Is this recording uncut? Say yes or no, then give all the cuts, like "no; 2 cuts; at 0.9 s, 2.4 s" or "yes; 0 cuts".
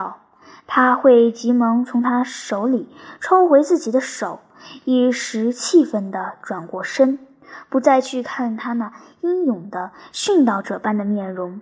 yes; 0 cuts